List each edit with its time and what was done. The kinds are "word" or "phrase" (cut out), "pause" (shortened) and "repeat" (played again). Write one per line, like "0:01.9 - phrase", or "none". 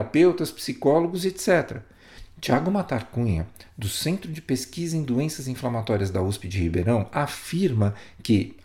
none